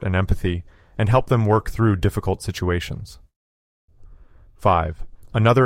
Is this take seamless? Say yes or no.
yes